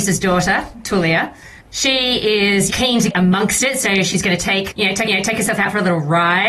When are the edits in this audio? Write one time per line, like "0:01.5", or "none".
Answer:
0:01.6
0:02.7
0:03.1
0:04.1
0:04.7
0:05.1